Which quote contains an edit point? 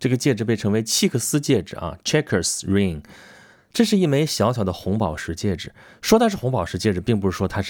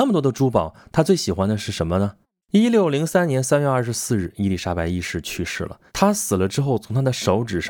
second; 2 cuts; at 2.2 s, 5.9 s

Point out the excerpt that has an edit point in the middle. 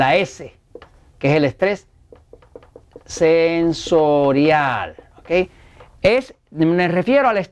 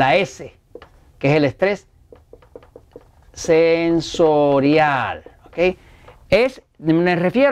first; 1 cut; at 3.0 s

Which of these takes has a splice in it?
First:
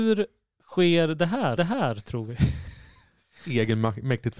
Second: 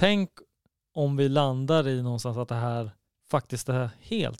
first; 1 cut; at 1.6 s

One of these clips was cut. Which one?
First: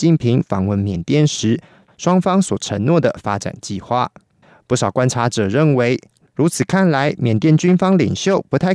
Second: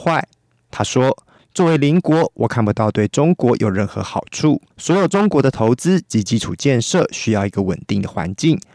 second; 1 cut; at 4.7 s

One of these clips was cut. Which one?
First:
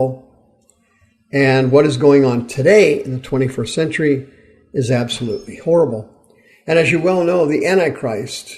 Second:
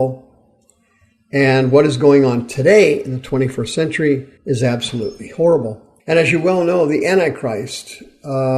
second; 2 cuts; at 4.4 s, 6.0 s

